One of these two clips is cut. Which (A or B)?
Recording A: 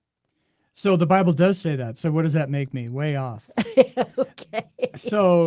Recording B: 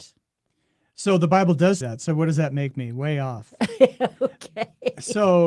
B